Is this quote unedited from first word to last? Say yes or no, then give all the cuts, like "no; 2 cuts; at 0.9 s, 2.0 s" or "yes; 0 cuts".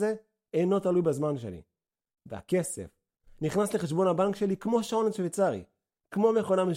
yes; 0 cuts